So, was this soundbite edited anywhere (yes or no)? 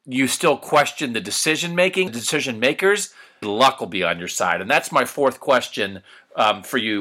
yes